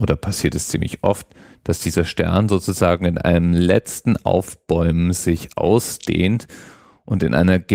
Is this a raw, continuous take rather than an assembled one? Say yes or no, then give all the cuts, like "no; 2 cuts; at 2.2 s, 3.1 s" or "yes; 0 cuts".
yes; 0 cuts